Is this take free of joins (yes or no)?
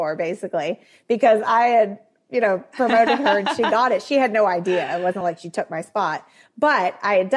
yes